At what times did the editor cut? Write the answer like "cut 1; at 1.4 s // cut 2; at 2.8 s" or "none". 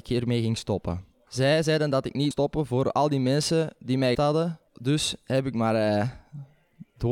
cut 1; at 1.1 s // cut 2; at 2.3 s // cut 3; at 4.1 s // cut 4; at 4.7 s